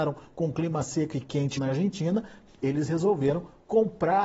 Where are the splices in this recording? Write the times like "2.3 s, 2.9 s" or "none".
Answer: 1.6 s